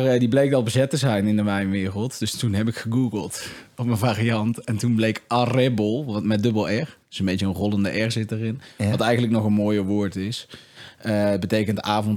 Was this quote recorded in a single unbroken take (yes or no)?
no